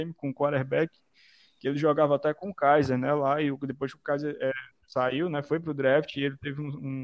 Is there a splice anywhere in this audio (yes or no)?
yes